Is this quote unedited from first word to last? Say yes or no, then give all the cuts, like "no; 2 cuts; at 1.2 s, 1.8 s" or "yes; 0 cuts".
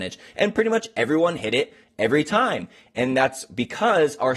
yes; 0 cuts